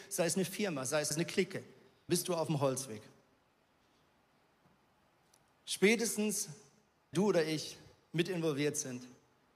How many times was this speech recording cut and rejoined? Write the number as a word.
three